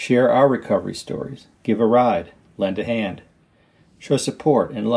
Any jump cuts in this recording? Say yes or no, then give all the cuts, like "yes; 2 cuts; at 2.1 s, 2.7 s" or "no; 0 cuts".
yes; 1 cut; at 1.5 s